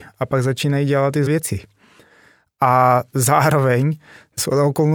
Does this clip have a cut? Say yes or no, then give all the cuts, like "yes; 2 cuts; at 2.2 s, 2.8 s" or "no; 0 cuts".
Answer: yes; 1 cut; at 1.3 s